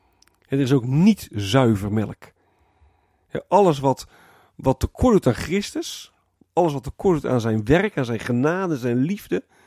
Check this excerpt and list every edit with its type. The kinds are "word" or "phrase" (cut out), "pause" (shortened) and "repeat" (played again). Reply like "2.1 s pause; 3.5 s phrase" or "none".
none